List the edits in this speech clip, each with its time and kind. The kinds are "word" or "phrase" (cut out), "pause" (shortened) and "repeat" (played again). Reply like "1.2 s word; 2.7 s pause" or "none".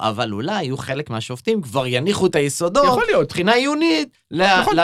none